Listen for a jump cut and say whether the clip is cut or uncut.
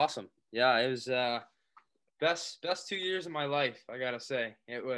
uncut